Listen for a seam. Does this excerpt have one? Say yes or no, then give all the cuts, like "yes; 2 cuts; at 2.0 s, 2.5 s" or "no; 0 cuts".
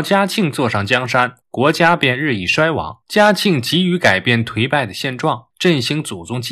yes; 3 cuts; at 1.4 s, 3.0 s, 5.5 s